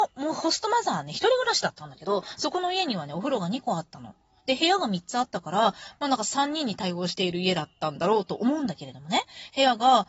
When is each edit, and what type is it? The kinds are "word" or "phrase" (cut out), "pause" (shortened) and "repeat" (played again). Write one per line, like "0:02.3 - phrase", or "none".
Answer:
none